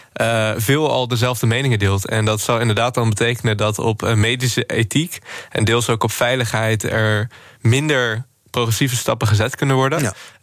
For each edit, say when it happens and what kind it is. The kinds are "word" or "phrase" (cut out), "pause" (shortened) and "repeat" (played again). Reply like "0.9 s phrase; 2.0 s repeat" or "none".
none